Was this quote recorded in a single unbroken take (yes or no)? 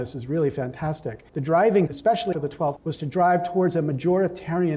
no